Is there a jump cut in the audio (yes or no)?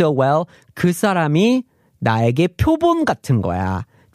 no